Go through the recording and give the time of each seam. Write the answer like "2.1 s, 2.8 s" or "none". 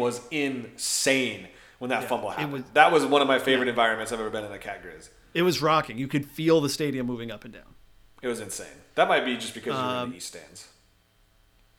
none